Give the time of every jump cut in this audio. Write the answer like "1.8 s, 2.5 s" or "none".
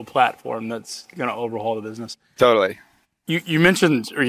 none